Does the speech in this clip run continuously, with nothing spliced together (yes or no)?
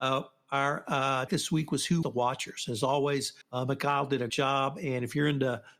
no